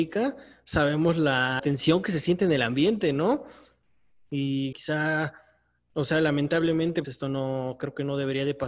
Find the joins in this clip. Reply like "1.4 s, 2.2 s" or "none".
1.6 s, 4.7 s, 7.0 s